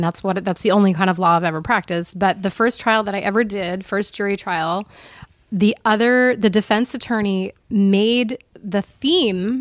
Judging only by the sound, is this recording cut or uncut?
uncut